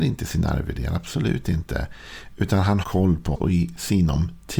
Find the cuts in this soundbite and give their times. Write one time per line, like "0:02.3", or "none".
0:02.8
0:03.3